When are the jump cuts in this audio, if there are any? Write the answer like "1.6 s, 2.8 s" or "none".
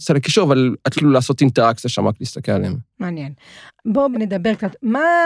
1.0 s, 4.1 s